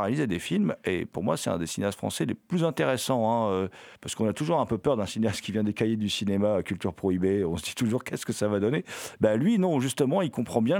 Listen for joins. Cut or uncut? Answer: cut